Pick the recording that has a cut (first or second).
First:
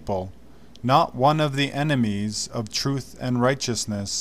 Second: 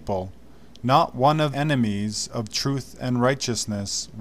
second